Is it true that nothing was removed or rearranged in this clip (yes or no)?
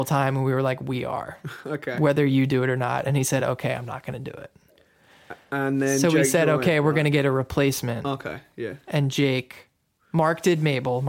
yes